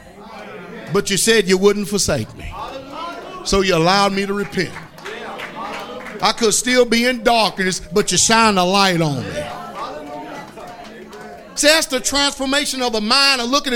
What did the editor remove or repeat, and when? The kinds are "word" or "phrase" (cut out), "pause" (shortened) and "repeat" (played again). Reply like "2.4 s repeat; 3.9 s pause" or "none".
none